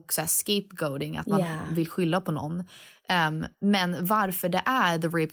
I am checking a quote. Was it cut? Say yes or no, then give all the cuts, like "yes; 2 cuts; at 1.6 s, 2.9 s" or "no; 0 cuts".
yes; 1 cut; at 3.5 s